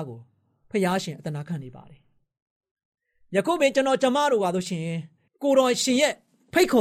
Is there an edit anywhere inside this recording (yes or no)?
yes